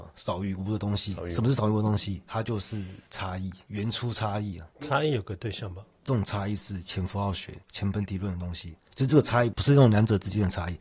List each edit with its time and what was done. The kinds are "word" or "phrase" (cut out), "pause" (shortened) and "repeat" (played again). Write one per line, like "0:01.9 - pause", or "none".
0:07.6 - pause
0:08.8 - pause